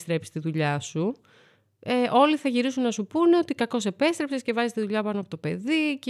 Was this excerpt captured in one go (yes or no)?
yes